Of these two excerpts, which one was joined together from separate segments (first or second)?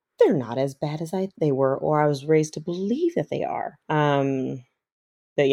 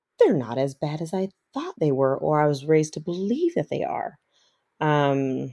first